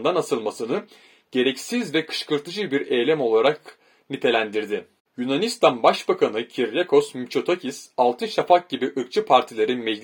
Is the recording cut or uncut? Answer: uncut